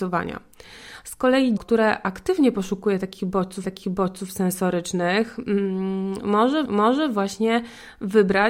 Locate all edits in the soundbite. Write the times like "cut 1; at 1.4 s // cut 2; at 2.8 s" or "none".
cut 1; at 1.6 s // cut 2; at 3.6 s // cut 3; at 6.6 s